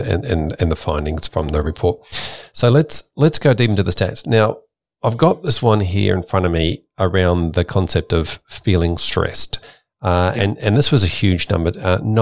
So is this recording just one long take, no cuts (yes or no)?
yes